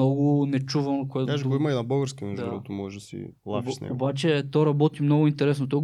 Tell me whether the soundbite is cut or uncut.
cut